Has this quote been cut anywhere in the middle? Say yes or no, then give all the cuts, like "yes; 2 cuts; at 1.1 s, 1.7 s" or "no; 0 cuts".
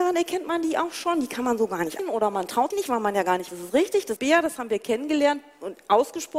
yes; 4 cuts; at 2.0 s, 2.7 s, 3.5 s, 4.2 s